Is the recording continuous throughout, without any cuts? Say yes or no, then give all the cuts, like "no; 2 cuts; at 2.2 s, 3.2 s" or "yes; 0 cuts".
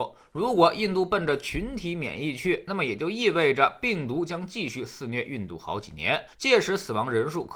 no; 1 cut; at 6.3 s